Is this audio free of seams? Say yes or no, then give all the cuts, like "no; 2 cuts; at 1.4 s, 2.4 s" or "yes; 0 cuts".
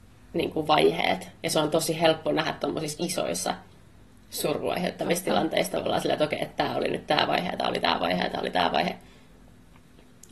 yes; 0 cuts